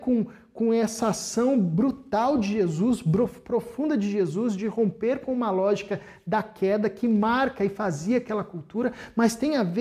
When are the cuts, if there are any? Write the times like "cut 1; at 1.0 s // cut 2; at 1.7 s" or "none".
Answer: none